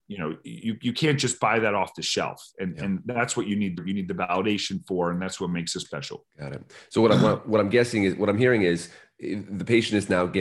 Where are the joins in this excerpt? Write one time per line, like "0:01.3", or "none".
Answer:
0:03.8
0:05.8
0:06.3